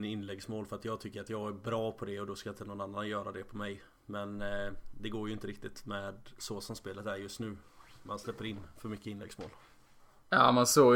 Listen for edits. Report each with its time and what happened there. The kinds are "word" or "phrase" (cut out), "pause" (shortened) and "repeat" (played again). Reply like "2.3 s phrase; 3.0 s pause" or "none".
none

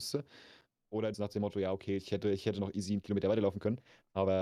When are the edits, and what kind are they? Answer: 1.1 s phrase

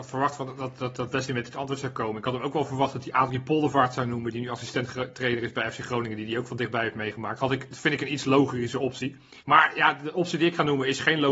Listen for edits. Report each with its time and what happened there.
9.4 s pause

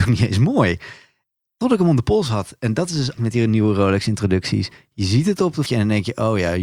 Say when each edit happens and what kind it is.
3.2 s word; 5.7 s word

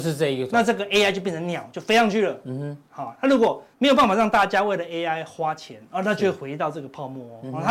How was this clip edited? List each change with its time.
3.7 s pause

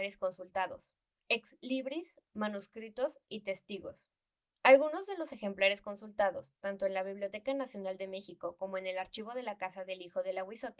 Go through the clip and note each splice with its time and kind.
none

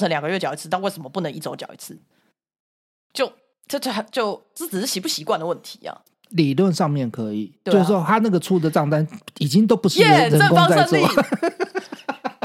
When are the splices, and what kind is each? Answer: 3.5 s pause

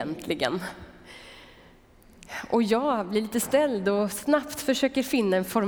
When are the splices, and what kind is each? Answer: none

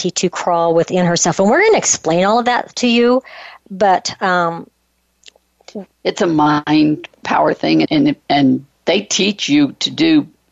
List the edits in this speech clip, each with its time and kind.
3.6 s pause; 7.8 s word; 8.8 s pause

